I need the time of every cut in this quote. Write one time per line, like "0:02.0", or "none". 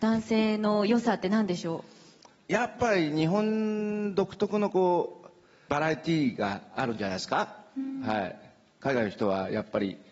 none